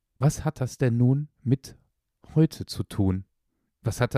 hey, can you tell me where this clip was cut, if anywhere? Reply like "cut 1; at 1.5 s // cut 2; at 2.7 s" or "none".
cut 1; at 1.3 s

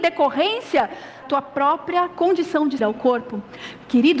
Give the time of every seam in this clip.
cut 1; at 1.2 s // cut 2; at 2.8 s

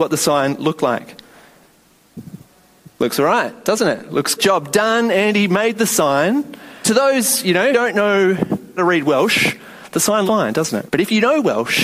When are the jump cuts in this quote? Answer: cut 1; at 4.4 s // cut 2; at 6.8 s // cut 3; at 7.7 s // cut 4; at 8.8 s // cut 5; at 10.3 s // cut 6; at 10.9 s

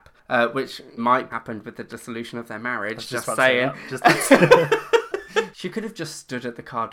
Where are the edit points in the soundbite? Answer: cut 1; at 1.0 s // cut 2; at 1.3 s

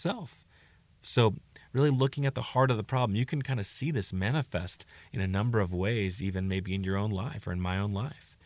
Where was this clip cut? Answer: none

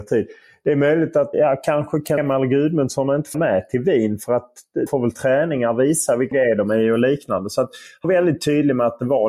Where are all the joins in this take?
cut 1; at 1.3 s // cut 2; at 2.2 s // cut 3; at 3.3 s // cut 4; at 4.9 s // cut 5; at 6.3 s // cut 6; at 8.0 s

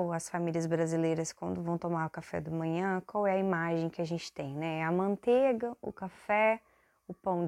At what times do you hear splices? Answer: none

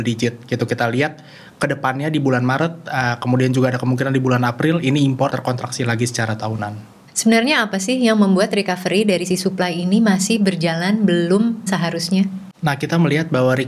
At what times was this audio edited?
cut 1; at 5.3 s // cut 2; at 7.1 s // cut 3; at 9.3 s // cut 4; at 11.7 s

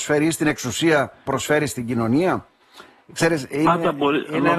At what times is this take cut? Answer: cut 1; at 1.3 s

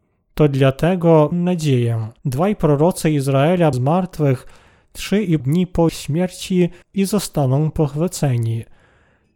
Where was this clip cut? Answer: cut 1; at 1.3 s // cut 2; at 2.2 s // cut 3; at 3.7 s // cut 4; at 5.4 s // cut 5; at 5.9 s // cut 6; at 6.8 s

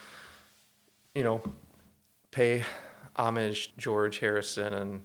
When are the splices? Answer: cut 1; at 3.7 s

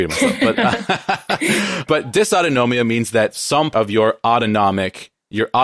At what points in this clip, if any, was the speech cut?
cut 1; at 1.8 s // cut 2; at 3.7 s

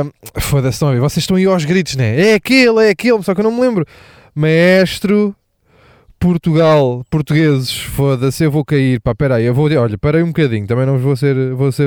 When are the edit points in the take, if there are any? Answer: none

